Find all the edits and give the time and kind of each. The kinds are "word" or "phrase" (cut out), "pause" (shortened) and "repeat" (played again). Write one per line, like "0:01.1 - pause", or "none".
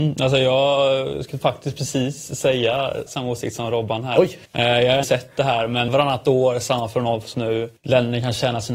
0:01.4 - word
0:03.1 - word
0:04.5 - pause
0:05.0 - word
0:05.9 - word
0:07.3 - word
0:07.8 - pause